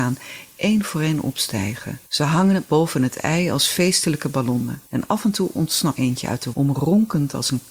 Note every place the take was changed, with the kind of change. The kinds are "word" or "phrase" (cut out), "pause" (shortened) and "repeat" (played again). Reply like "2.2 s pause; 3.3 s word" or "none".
2.1 s pause; 4.9 s pause; 6.0 s word; 6.5 s word